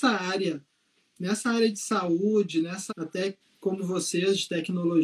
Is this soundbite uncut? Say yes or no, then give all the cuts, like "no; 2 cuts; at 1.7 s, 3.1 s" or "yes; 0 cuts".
no; 1 cut; at 2.9 s